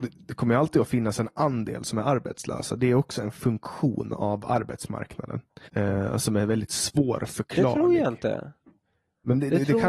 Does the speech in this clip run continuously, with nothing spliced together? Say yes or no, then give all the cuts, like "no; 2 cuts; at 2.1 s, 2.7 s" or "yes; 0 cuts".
no; 1 cut; at 5.7 s